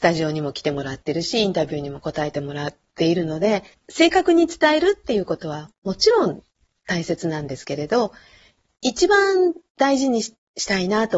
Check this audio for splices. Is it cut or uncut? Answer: cut